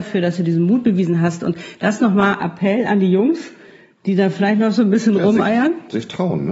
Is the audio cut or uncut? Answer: uncut